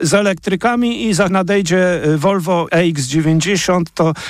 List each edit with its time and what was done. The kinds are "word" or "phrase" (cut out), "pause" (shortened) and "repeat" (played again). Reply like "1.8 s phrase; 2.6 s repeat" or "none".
1.3 s word; 2.7 s word